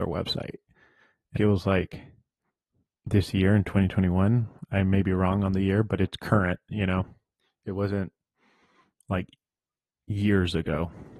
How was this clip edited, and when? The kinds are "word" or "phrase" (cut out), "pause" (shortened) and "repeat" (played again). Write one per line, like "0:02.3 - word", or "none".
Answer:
0:01.4 - phrase
0:02.5 - pause